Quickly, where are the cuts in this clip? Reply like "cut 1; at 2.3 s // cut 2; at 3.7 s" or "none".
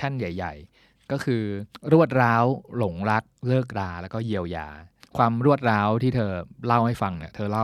none